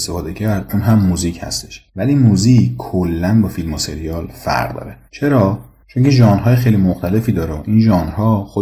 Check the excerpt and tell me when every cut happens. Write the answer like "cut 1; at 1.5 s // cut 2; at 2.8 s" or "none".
cut 1; at 5.0 s